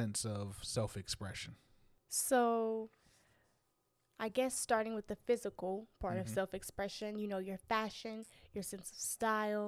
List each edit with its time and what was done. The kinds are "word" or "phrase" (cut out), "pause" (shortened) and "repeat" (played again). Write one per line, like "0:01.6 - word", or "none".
none